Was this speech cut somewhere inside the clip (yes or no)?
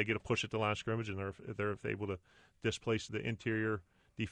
yes